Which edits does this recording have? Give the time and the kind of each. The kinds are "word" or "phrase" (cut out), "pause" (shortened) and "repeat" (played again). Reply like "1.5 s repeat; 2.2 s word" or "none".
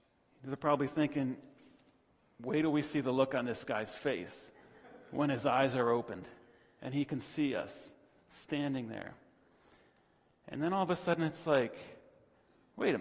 none